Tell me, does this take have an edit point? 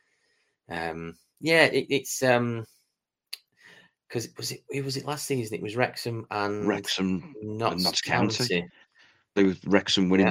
yes; 1 cut; at 9.4 s

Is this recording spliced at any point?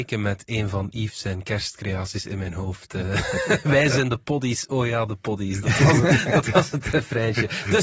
no; 0 cuts

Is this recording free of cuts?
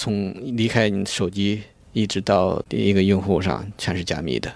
yes; 0 cuts

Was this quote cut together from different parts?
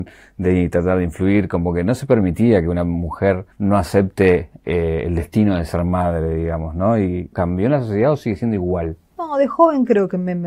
yes; 2 cuts; at 3.5 s, 7.3 s

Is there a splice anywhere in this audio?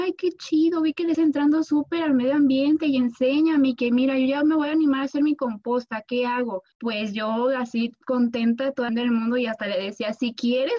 yes; 3 cuts; at 1.1 s, 6.7 s, 8.9 s

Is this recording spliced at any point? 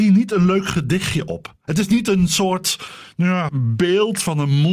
yes; 1 cut; at 3.5 s

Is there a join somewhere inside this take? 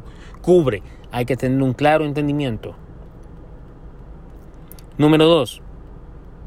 no; 0 cuts

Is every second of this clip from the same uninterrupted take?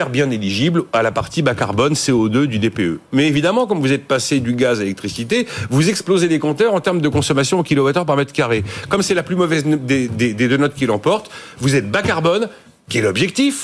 yes; 0 cuts

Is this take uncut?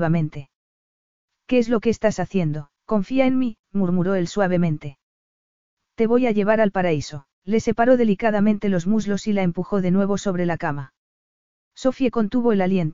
no; 3 cuts; at 2.8 s, 3.6 s, 7.3 s

